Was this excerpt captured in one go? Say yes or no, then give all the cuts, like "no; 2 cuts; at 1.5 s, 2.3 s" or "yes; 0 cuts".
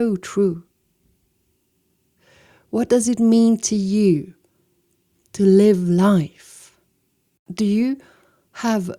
yes; 0 cuts